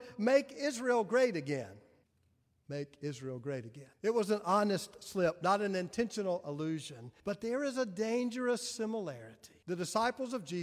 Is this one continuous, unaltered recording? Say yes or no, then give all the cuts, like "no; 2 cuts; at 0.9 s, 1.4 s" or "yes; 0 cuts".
no; 4 cuts; at 2.0 s, 3.9 s, 7.2 s, 9.6 s